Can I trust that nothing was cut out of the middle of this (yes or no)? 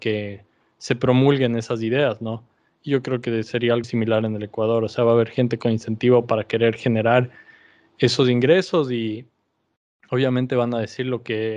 no